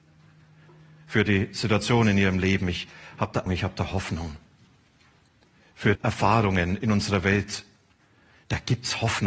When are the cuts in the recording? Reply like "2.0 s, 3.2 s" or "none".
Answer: 3.5 s, 6.0 s